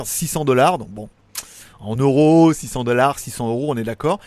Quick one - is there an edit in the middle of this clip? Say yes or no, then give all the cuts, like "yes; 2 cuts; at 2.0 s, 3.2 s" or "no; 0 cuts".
no; 0 cuts